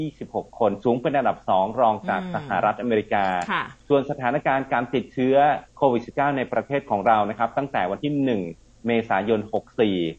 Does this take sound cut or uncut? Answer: cut